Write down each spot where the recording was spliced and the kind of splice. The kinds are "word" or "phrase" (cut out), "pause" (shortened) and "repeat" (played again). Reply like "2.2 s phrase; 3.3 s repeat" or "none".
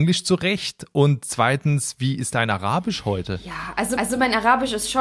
4.0 s repeat